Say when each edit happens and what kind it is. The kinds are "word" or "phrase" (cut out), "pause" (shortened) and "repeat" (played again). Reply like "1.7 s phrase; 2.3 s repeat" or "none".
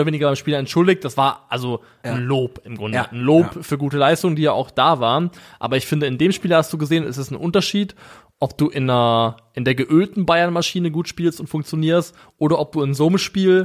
none